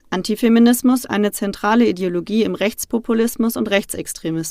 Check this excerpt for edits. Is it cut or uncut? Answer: cut